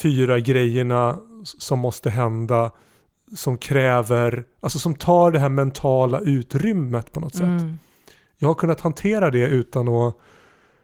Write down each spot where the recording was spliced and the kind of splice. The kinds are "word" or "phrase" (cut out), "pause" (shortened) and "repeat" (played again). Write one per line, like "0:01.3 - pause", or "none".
none